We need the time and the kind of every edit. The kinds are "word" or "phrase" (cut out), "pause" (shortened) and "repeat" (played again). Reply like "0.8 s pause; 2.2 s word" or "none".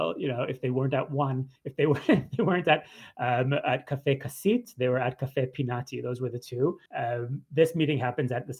1.6 s pause; 6.9 s pause